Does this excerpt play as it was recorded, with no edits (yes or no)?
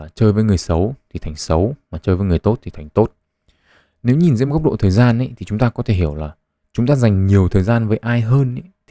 yes